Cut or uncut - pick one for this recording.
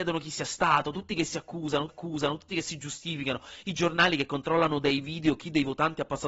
cut